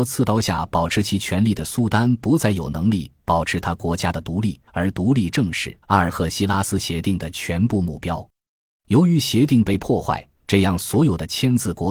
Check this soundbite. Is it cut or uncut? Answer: cut